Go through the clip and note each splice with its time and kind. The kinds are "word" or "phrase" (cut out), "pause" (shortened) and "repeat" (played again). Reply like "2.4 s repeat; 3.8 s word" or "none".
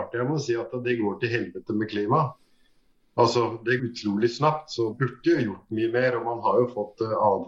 3.8 s word; 4.9 s word